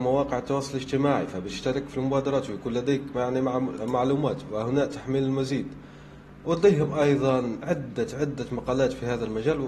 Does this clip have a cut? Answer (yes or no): no